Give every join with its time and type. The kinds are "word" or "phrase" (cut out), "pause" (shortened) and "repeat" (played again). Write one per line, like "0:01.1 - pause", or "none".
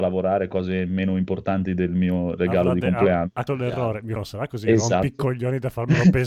0:03.5 - word
0:04.2 - word